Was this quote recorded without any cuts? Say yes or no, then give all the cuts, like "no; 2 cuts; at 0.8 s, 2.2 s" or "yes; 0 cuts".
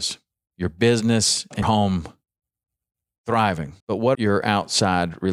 no; 3 cuts; at 1.6 s, 3.8 s, 4.1 s